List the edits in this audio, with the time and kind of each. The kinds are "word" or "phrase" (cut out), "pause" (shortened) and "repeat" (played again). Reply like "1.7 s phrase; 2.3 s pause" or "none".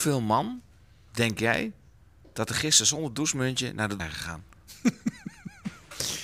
4.0 s word